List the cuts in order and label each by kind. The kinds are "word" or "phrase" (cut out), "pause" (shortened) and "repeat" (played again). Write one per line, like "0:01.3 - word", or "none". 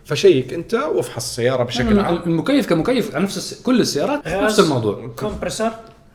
0:04.2 - word